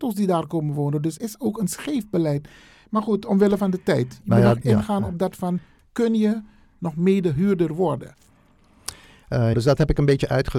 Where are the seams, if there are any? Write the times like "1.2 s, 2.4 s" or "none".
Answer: 1.2 s, 4.6 s, 9.5 s